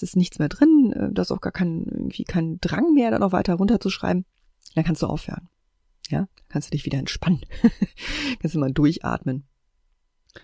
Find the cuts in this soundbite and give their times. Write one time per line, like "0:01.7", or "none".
none